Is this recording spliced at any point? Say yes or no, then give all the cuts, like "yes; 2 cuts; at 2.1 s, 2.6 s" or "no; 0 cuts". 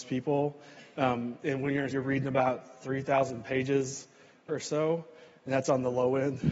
yes; 3 cuts; at 1.4 s, 1.9 s, 4.5 s